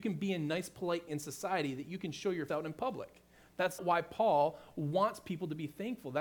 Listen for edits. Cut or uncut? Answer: cut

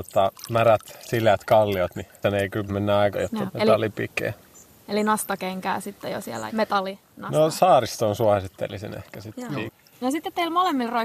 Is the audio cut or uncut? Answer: cut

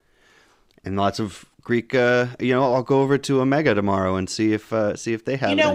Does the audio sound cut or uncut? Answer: uncut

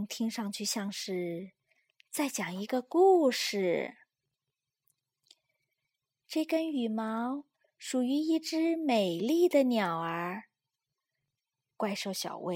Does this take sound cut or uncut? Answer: uncut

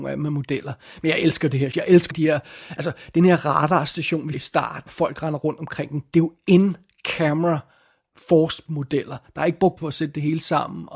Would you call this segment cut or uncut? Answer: cut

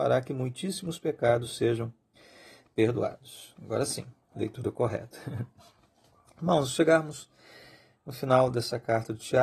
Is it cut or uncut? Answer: uncut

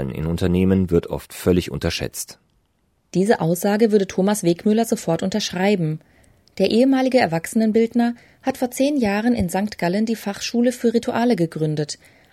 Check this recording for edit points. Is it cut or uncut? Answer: uncut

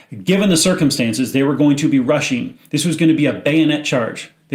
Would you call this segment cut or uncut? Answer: uncut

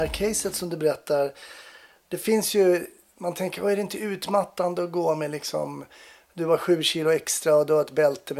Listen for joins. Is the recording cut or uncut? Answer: uncut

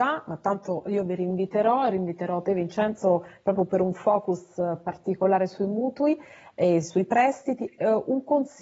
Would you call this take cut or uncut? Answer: uncut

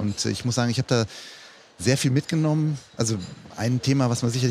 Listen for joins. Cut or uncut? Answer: uncut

